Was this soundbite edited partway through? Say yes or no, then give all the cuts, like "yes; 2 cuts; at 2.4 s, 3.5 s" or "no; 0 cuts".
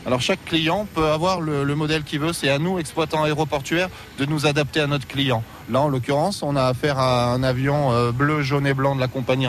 no; 0 cuts